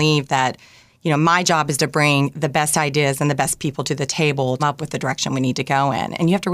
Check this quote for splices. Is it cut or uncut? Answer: cut